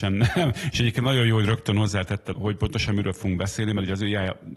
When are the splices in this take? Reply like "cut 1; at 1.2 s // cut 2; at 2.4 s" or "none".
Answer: cut 1; at 2.3 s